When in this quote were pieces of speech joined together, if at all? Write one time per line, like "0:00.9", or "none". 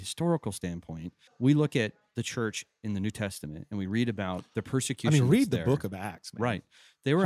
0:01.3